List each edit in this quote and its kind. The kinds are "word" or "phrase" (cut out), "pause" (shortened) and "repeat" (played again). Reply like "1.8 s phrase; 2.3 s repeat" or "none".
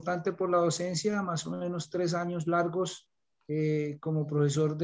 3.3 s pause